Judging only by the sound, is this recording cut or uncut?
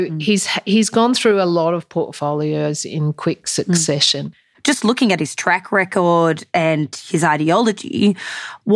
uncut